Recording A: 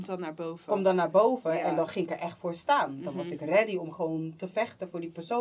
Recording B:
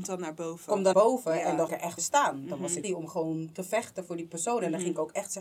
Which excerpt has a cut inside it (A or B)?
B